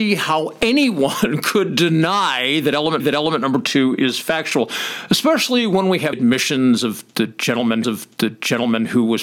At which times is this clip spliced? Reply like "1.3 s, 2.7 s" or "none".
3.0 s, 6.1 s, 7.8 s